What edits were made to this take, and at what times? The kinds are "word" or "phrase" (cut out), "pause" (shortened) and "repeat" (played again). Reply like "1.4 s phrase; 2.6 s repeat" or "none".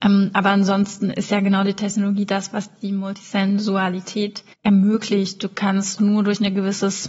4.5 s pause; 6.0 s word